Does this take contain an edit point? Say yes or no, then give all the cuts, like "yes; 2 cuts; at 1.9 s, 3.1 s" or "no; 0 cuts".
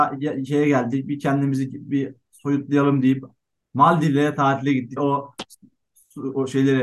yes; 1 cut; at 5.0 s